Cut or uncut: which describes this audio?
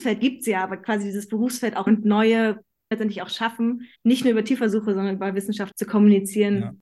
cut